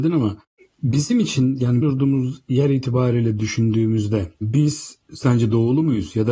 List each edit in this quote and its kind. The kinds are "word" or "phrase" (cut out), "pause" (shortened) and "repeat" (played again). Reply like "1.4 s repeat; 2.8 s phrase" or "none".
1.8 s word; 4.3 s pause